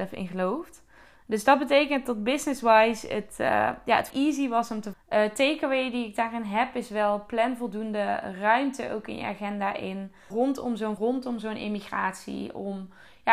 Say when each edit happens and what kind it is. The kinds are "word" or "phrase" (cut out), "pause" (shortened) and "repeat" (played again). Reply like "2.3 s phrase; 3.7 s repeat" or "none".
4.1 s word; 4.9 s word; 10.3 s word; 11.0 s word